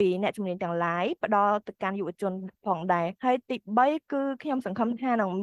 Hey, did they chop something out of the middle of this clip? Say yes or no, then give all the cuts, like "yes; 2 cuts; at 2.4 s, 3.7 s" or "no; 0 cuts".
yes; 1 cut; at 3.2 s